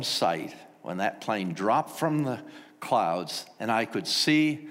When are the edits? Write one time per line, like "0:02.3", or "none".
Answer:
none